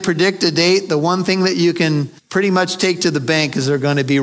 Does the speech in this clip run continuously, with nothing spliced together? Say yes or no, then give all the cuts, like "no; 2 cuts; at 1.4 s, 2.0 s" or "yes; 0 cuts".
no; 1 cut; at 2.2 s